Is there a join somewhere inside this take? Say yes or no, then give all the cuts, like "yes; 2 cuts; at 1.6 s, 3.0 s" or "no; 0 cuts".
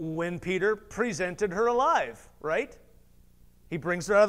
no; 0 cuts